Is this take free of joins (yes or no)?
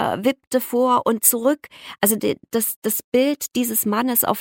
yes